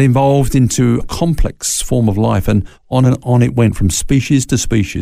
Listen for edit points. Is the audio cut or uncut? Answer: cut